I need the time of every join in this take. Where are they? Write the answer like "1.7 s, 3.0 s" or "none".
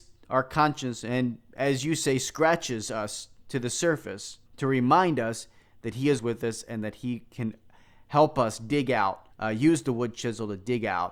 4.5 s, 6.2 s, 9.3 s